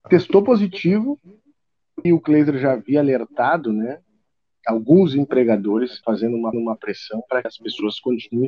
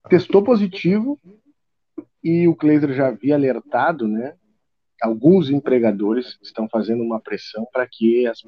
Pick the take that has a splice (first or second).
first